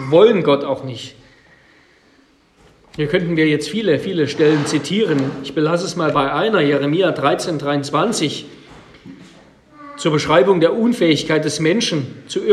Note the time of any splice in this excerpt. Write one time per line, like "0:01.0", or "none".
none